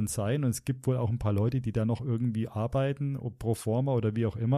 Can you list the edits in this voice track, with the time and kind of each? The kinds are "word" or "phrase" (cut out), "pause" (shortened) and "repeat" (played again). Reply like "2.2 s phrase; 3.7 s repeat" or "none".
none